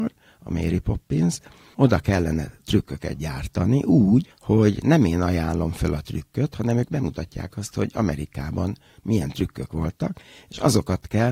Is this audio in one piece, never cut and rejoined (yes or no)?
yes